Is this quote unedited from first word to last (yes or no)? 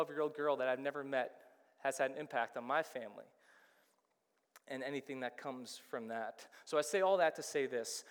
yes